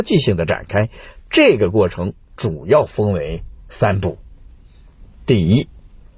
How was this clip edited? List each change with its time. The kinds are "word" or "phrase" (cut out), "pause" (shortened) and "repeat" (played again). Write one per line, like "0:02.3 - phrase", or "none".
none